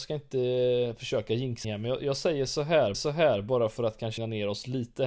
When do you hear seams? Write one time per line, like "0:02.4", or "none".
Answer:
0:01.6
0:02.9
0:04.2

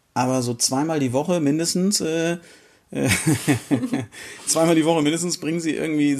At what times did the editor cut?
none

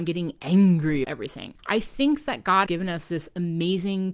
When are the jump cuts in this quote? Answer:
0:01.0
0:01.6
0:02.7

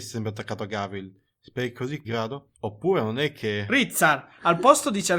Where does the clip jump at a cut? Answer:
0:02.0
0:02.5

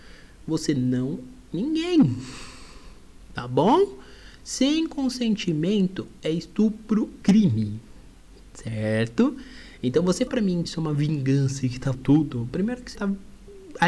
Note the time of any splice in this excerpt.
0:01.5
0:07.2
0:10.3
0:10.6
0:11.9
0:12.9

